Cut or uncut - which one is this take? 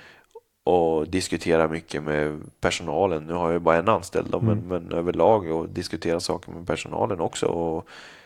uncut